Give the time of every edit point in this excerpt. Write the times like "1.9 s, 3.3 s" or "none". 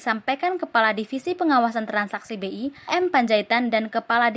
2.9 s